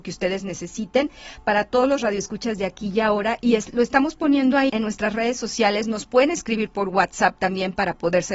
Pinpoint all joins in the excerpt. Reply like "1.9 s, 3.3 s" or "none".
4.7 s

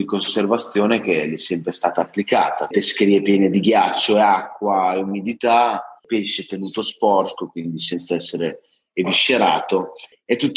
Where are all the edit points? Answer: 2.7 s

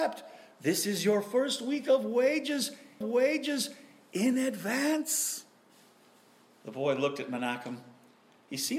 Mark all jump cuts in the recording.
3.0 s

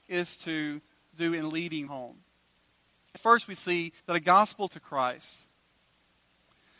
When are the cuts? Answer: 1.9 s, 3.2 s, 4.0 s, 4.7 s

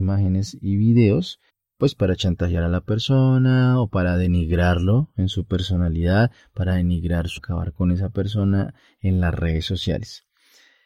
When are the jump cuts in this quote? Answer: 1.5 s, 7.4 s

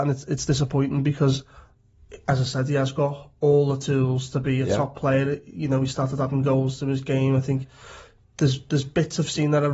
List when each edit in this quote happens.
8.2 s

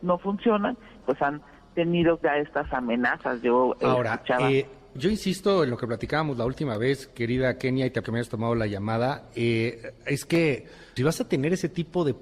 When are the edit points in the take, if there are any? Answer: 1.0 s, 2.2 s, 4.9 s, 8.0 s, 11.0 s

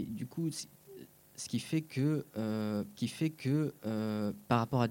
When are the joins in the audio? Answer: 3.0 s

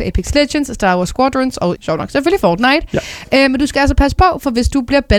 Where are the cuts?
1.8 s

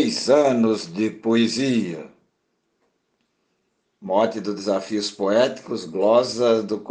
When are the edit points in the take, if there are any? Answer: none

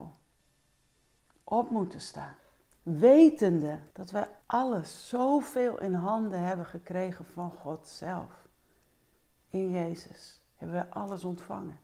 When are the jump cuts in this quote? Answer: 3.9 s, 4.4 s

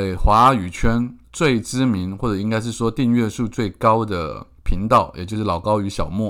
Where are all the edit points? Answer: 1.2 s, 4.6 s

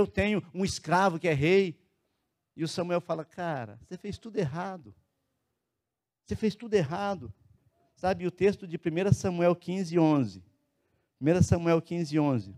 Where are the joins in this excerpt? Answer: none

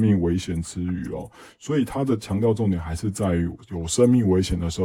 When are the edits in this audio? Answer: none

